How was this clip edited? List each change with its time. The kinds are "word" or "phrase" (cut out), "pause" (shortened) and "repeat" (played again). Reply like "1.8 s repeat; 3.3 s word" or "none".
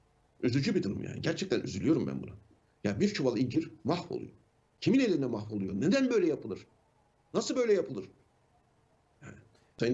none